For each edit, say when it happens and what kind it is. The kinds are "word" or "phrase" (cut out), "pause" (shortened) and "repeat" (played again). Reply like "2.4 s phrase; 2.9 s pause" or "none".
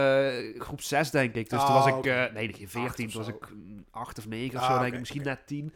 none